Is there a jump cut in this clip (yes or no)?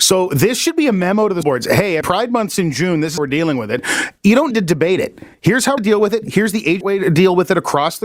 yes